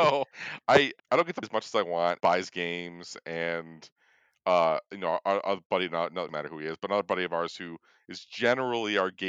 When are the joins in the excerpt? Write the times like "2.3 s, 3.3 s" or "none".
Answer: 1.0 s, 1.4 s, 2.2 s, 6.3 s